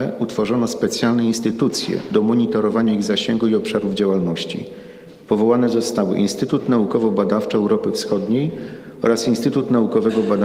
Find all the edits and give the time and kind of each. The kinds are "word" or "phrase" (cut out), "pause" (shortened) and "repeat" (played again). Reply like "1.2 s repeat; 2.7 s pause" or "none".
none